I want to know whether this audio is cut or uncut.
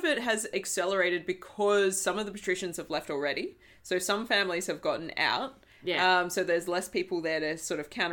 uncut